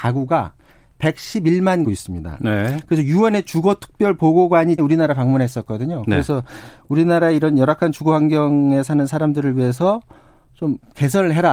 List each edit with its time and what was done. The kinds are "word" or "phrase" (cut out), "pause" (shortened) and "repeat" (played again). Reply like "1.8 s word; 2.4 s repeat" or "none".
1.8 s phrase; 4.8 s word